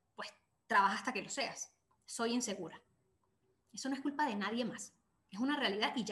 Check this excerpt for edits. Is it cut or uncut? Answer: uncut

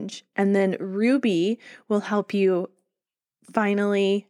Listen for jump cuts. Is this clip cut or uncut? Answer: uncut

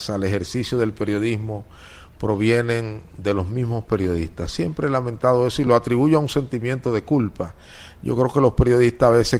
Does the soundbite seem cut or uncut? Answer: uncut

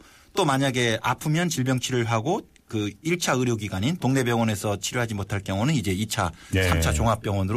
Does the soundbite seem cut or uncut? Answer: uncut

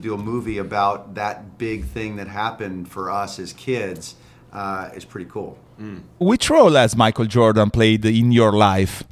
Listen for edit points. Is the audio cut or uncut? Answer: uncut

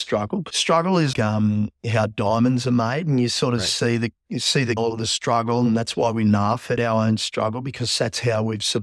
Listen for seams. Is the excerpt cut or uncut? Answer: cut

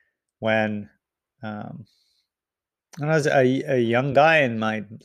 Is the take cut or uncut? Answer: uncut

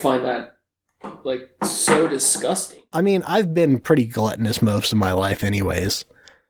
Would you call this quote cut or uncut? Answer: uncut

